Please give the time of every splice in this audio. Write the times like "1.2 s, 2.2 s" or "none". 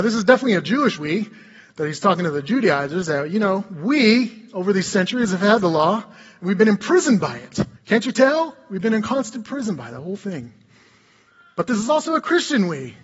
7.8 s